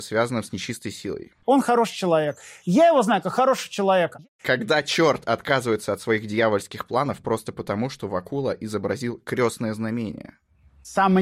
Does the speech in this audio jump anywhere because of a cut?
no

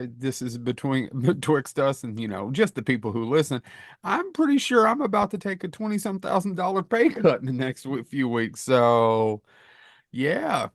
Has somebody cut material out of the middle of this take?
no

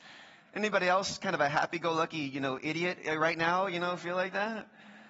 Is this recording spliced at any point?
no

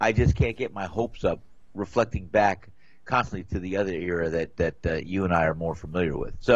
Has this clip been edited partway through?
no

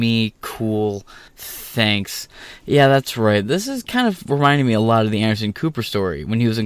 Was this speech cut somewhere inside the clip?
yes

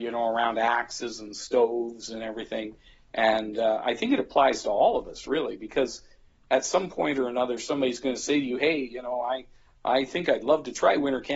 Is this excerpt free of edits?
yes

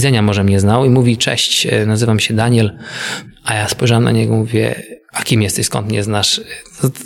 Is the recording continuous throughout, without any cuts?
yes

